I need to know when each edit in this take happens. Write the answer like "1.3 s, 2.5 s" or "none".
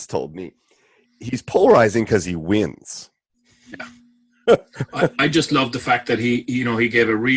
none